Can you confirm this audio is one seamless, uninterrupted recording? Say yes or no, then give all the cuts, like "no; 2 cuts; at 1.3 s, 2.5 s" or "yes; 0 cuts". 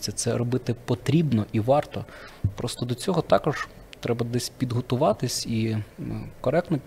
yes; 0 cuts